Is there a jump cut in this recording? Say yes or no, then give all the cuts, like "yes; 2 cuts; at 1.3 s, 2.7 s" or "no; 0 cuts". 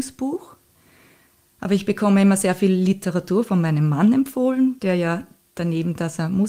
no; 0 cuts